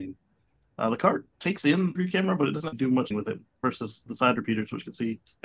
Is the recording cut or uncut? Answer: cut